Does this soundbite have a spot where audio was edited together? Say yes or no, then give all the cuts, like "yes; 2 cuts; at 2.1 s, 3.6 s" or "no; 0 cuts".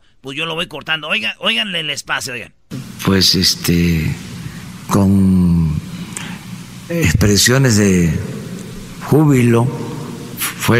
no; 0 cuts